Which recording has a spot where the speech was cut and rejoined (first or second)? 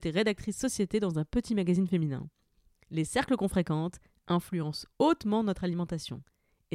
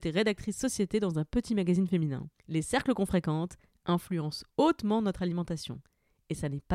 second